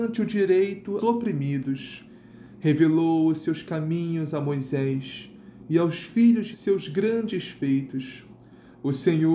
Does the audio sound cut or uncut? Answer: cut